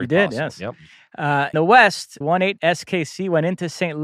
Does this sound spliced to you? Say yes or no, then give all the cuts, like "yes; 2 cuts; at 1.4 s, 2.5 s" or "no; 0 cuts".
yes; 3 cuts; at 1.5 s, 2.2 s, 2.6 s